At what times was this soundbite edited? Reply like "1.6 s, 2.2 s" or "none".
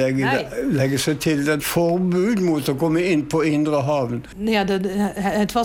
1.6 s